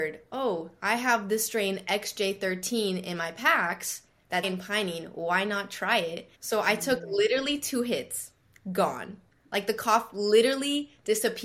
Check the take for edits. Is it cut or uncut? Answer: cut